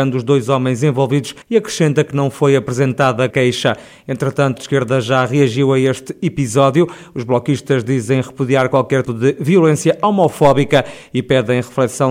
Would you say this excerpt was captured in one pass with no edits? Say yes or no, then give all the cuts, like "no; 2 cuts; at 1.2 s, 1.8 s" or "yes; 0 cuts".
no; 4 cuts; at 1.4 s, 3.3 s, 4.6 s, 9.0 s